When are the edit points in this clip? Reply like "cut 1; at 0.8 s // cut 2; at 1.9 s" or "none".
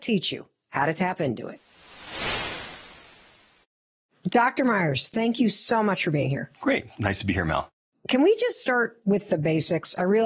none